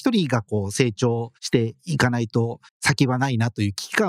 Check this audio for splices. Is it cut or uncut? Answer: cut